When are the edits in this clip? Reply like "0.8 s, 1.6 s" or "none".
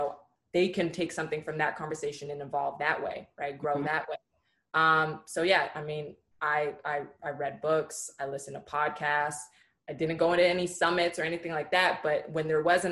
none